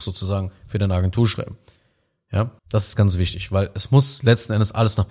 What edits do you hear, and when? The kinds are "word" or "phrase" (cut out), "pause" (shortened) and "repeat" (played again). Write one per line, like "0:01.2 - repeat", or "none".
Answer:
0:02.6 - pause
0:03.0 - word